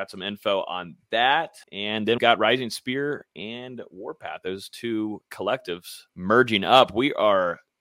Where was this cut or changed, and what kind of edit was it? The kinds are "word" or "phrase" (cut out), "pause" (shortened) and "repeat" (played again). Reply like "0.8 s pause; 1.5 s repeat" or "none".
1.6 s pause; 2.2 s word; 6.1 s pause